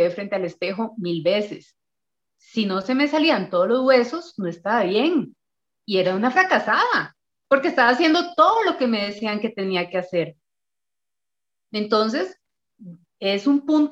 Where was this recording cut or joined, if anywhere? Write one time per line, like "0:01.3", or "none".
none